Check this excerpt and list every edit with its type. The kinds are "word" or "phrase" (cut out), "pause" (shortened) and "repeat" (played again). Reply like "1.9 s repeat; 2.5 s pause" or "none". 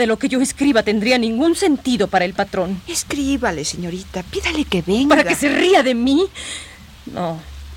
none